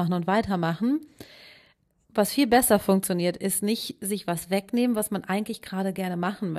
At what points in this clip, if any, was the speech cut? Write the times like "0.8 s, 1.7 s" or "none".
none